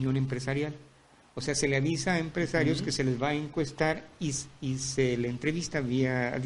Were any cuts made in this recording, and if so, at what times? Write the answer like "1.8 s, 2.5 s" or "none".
none